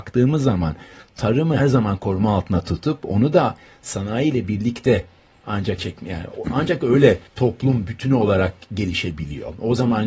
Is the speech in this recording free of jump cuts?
no; 3 cuts; at 1.6 s, 5.8 s, 7.3 s

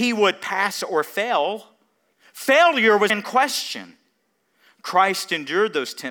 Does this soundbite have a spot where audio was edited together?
yes; 2 cuts; at 2.1 s, 3.1 s

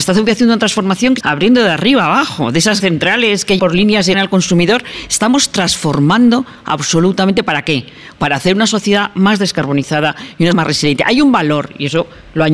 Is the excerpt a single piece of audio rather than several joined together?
no; 5 cuts; at 1.2 s, 2.8 s, 3.6 s, 4.1 s, 10.5 s

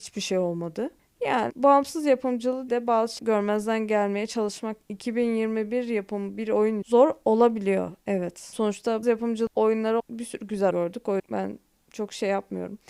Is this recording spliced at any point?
yes; 9 cuts; at 1.5 s, 2.7 s, 3.2 s, 4.9 s, 6.8 s, 9.0 s, 10.0 s, 10.7 s, 11.2 s

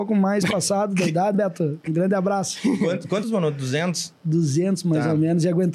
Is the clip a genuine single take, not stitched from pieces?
no; 2 cuts; at 1.3 s, 3.2 s

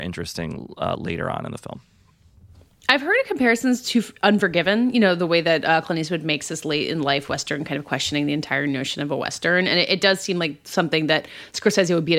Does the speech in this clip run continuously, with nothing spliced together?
yes; 0 cuts

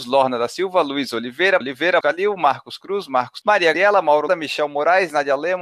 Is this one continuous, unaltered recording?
no; 5 cuts; at 1.6 s, 2.0 s, 3.4 s, 3.7 s, 4.3 s

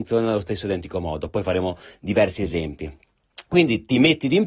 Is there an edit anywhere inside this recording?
no; 0 cuts

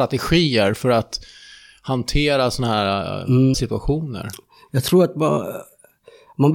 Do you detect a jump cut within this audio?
yes; 1 cut; at 3.5 s

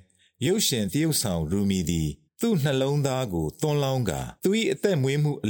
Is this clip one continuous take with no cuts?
no; 2 cuts; at 2.3 s, 4.4 s

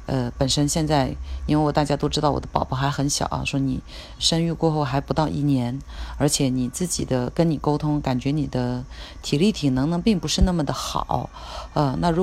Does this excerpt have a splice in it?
yes; 1 cut; at 4.2 s

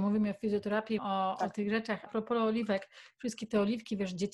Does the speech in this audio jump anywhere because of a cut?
yes; 2 cuts; at 1.0 s, 2.1 s

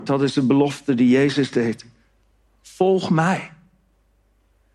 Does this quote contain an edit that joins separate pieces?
no; 0 cuts

